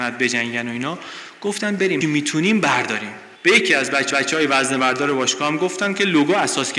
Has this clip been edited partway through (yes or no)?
yes